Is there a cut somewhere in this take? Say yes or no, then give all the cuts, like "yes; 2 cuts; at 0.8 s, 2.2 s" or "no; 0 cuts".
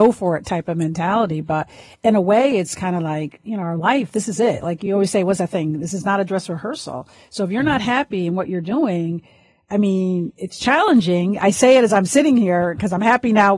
no; 0 cuts